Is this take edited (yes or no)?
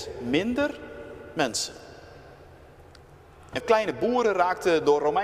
yes